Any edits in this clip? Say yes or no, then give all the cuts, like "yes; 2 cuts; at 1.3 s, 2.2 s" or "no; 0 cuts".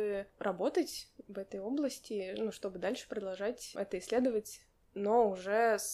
no; 0 cuts